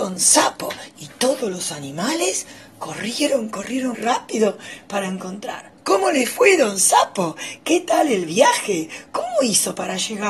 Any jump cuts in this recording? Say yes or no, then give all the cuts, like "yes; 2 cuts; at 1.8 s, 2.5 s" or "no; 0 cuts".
yes; 2 cuts; at 3.9 s, 5.8 s